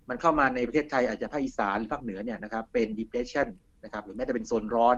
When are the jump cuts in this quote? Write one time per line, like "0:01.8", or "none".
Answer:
none